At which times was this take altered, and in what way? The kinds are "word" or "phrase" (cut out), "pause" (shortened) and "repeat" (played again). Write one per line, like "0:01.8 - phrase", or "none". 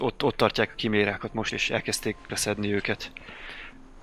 0:01.5 - word
0:02.3 - word